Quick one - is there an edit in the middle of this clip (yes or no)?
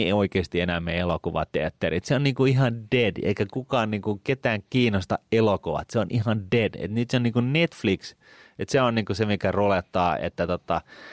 no